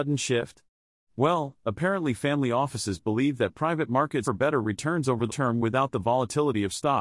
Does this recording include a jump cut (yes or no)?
yes